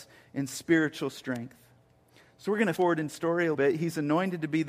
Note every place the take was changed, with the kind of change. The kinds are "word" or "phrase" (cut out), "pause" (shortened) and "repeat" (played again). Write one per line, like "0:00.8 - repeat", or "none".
0:02.8 - word
0:03.1 - word
0:03.5 - word